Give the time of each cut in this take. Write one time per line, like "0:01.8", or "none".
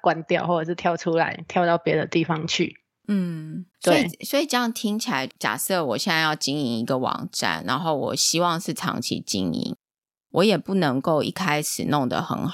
0:03.7